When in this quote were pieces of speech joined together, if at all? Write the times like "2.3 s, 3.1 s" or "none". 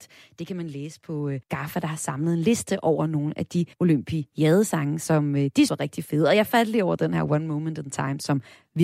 1.4 s, 3.7 s, 5.7 s